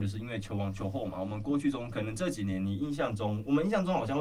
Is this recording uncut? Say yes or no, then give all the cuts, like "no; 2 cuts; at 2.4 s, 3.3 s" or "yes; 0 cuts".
yes; 0 cuts